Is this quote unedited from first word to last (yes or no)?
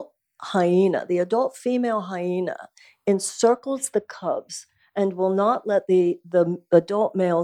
yes